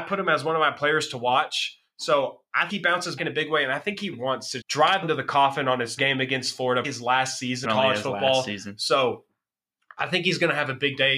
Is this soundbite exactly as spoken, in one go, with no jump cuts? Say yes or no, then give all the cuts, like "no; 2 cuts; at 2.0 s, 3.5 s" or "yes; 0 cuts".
no; 8 cuts; at 2.7 s, 3.2 s, 4.1 s, 4.6 s, 5.0 s, 6.0 s, 6.8 s, 7.6 s